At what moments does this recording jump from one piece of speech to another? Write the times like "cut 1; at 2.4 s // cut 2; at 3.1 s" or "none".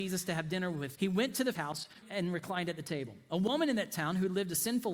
cut 1; at 0.9 s // cut 2; at 1.5 s // cut 3; at 2.0 s